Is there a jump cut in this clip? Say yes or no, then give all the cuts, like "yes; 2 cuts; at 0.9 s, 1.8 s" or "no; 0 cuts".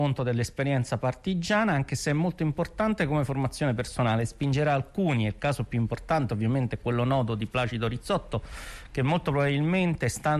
no; 0 cuts